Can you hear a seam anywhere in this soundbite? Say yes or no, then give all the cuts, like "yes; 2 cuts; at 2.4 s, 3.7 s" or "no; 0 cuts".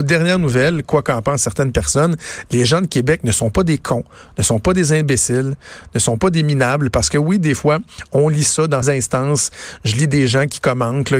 yes; 1 cut; at 8.8 s